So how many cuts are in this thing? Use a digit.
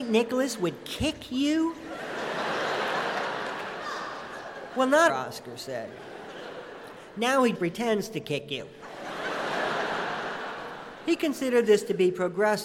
2